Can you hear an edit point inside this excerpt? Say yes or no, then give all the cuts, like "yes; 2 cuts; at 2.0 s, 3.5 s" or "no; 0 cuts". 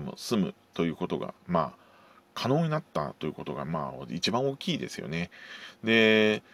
yes; 1 cut; at 1.4 s